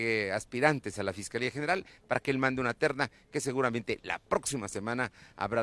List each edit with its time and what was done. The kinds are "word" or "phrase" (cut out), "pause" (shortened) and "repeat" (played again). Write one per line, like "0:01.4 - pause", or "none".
none